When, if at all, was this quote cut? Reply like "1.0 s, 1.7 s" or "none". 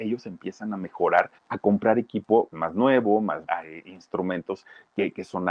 1.4 s, 2.5 s, 3.5 s